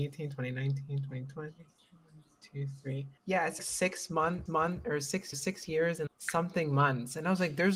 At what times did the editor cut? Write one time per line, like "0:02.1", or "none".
0:03.2
0:03.6
0:04.5
0:05.3
0:06.1